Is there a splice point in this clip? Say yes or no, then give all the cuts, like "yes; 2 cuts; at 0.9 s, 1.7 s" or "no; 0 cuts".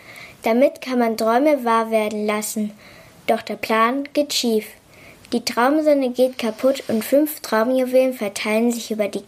no; 0 cuts